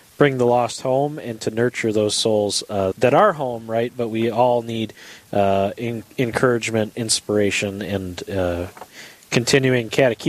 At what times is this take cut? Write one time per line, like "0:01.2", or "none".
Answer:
0:02.9